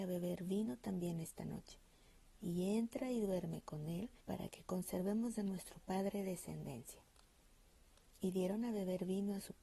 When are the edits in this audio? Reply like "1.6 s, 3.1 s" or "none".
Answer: 4.2 s